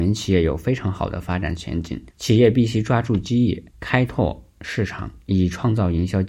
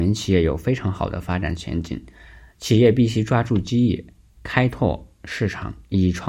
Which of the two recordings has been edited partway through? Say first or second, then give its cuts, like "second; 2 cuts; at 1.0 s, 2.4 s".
first; 2 cuts; at 2.1 s, 3.7 s